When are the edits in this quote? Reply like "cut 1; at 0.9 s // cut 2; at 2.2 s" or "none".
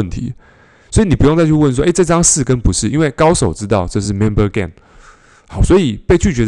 none